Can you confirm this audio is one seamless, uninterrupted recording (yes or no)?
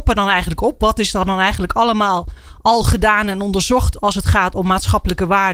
yes